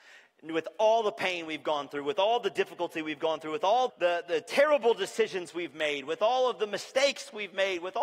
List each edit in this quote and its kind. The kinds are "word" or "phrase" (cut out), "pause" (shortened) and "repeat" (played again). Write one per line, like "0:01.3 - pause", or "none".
0:03.9 - word